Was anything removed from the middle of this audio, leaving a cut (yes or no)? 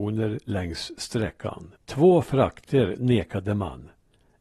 yes